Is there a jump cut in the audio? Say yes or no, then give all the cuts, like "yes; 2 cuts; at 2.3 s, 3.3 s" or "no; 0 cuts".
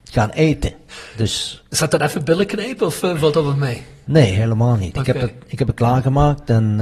no; 0 cuts